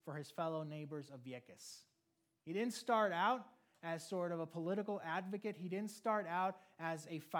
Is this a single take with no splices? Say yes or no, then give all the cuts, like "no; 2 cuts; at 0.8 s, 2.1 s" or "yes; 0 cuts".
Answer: yes; 0 cuts